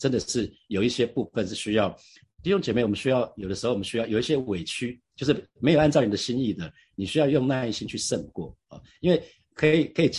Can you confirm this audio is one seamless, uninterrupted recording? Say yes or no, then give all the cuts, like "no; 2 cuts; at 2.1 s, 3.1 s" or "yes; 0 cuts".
yes; 0 cuts